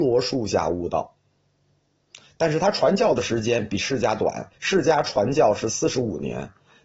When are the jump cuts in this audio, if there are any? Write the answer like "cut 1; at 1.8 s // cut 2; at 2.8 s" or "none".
cut 1; at 4.6 s